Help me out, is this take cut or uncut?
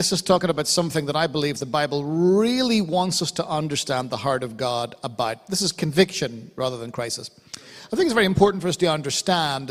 uncut